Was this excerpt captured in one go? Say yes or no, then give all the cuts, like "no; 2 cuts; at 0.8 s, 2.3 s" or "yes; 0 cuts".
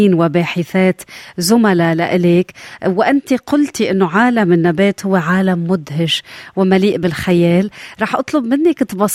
yes; 0 cuts